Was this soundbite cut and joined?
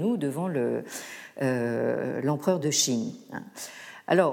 no; 0 cuts

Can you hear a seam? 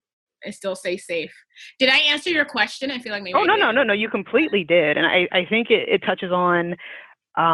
no; 0 cuts

